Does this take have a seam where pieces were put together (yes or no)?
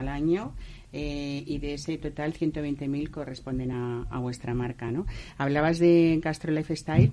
no